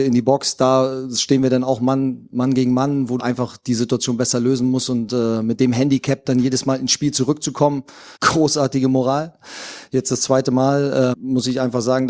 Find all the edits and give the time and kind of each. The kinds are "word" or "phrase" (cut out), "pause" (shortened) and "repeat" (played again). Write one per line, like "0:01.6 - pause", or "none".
0:03.2 - word
0:08.2 - pause
0:11.1 - word